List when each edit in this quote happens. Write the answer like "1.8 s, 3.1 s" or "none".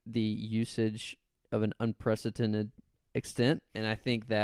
1.3 s, 3.0 s